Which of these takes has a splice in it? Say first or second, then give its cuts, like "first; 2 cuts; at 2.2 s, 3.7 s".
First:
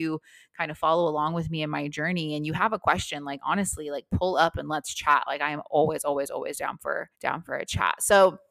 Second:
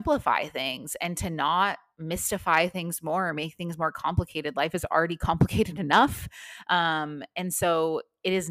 first; 1 cut; at 7.1 s